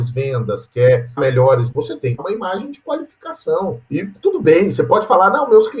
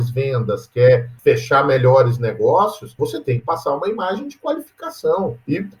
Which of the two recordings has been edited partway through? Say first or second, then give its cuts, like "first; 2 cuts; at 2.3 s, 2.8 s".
first; 3 cuts; at 1.2 s, 1.7 s, 2.2 s